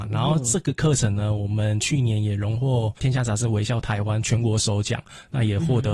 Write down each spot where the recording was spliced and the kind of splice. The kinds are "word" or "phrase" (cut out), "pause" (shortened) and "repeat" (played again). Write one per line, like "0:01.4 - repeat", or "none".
0:03.0 - pause